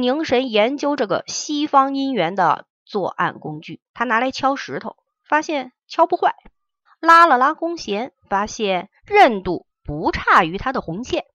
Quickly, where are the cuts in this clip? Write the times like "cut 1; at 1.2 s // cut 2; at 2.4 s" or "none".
cut 1; at 3.9 s // cut 2; at 5.8 s // cut 3; at 6.9 s // cut 4; at 8.2 s // cut 5; at 9.0 s